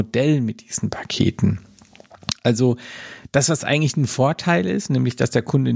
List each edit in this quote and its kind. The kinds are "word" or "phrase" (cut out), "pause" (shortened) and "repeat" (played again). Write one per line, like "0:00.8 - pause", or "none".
none